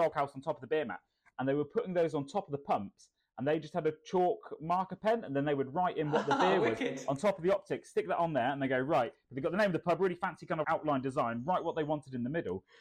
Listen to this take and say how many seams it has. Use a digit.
1